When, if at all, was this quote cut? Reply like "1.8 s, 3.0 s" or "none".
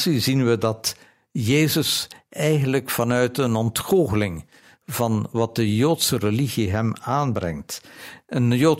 none